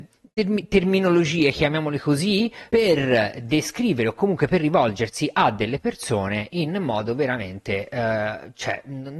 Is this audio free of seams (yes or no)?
yes